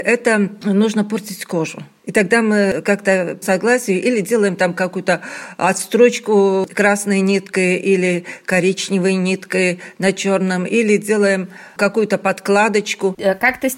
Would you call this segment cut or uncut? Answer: cut